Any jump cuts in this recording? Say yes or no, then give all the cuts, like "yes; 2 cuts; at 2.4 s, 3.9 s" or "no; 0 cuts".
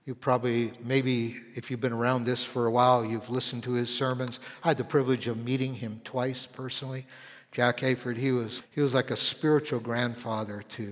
yes; 1 cut; at 8.6 s